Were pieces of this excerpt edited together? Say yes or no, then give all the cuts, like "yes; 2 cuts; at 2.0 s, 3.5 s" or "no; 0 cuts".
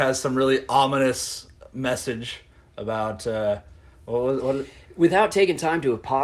no; 0 cuts